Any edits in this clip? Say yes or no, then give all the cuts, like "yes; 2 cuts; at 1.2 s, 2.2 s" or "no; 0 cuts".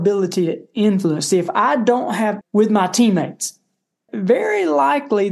yes; 2 cuts; at 2.4 s, 4.1 s